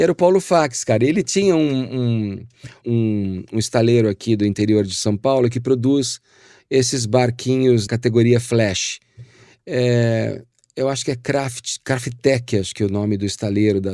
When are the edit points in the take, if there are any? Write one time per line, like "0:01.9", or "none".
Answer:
0:02.8
0:07.9